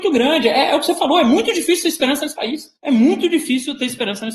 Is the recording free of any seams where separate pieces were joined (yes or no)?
no